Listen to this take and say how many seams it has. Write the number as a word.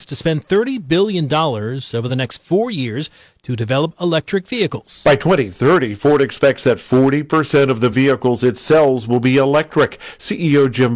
zero